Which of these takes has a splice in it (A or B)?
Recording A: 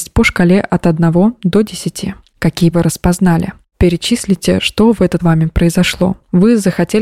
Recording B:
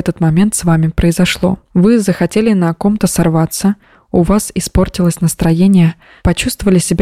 A